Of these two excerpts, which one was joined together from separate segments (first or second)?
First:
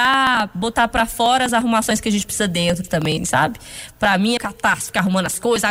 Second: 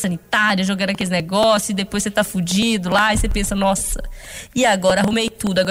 first